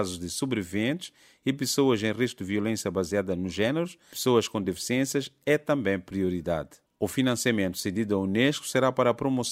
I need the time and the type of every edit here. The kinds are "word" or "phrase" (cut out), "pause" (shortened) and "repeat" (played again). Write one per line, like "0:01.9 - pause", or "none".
none